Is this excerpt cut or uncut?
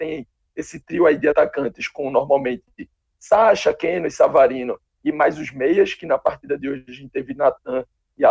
uncut